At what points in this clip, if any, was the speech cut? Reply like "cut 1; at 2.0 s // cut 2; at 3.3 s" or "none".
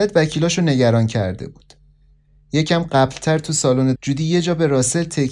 cut 1; at 4.0 s